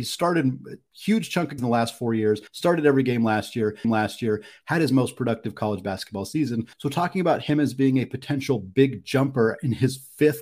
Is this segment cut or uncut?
cut